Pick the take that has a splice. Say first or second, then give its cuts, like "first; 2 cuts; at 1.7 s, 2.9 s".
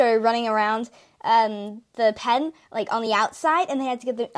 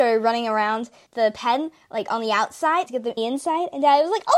second; 3 cuts; at 1.1 s, 2.9 s, 3.2 s